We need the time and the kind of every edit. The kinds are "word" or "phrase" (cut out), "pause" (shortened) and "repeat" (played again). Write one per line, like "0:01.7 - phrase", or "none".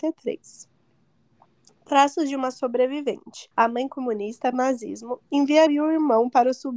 0:03.5 - pause
0:04.5 - phrase
0:05.7 - word